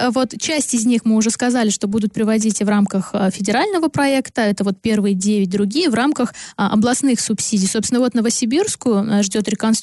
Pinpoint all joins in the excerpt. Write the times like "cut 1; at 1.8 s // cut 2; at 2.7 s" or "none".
none